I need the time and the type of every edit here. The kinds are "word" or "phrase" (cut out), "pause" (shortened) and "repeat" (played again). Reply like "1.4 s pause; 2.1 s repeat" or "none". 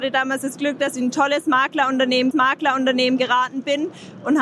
2.3 s repeat